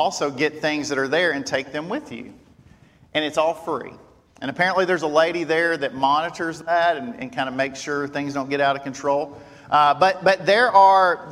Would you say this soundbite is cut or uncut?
uncut